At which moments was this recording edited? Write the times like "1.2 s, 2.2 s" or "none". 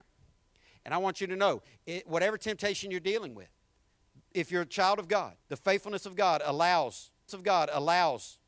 5.4 s, 7.3 s